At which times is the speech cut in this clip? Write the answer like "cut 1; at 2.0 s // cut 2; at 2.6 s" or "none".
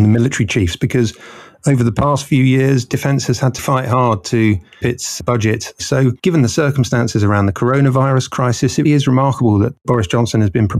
cut 1; at 3.6 s // cut 2; at 4.8 s // cut 3; at 6.2 s // cut 4; at 8.8 s